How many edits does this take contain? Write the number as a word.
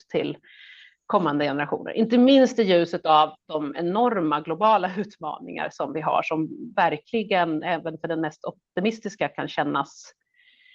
zero